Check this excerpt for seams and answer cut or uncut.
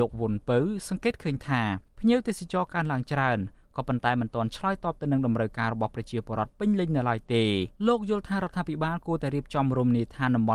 cut